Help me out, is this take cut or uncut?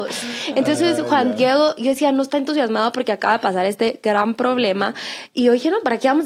uncut